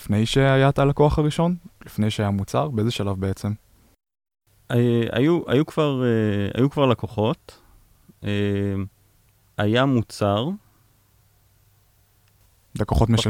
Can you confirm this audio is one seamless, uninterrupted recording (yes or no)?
yes